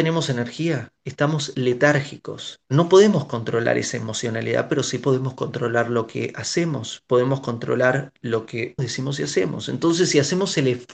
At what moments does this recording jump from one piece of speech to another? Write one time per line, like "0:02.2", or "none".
0:01.0
0:02.6
0:08.8